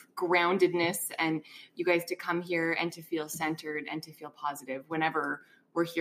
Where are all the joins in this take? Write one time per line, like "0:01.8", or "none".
none